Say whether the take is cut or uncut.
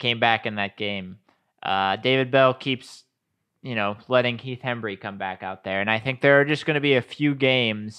uncut